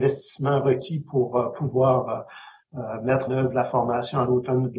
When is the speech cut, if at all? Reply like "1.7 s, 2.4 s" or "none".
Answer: 3.3 s